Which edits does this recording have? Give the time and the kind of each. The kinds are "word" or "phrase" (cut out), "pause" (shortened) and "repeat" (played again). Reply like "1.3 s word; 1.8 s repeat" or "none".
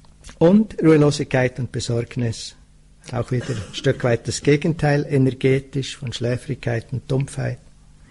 none